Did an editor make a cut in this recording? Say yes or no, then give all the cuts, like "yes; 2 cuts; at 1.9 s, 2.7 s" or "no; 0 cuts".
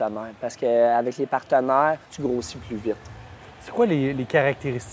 yes; 1 cut; at 2.1 s